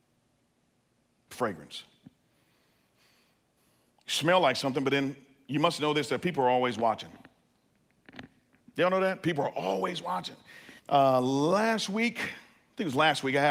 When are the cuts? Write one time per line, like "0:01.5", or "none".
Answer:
0:10.8